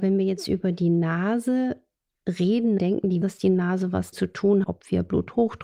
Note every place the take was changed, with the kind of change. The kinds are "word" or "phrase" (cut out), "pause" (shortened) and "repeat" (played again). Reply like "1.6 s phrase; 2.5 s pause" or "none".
2.8 s word; 3.2 s word; 4.1 s word; 4.6 s word